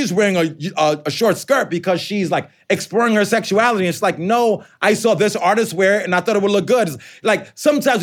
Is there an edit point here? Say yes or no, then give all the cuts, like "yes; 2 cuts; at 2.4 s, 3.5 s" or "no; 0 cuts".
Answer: no; 0 cuts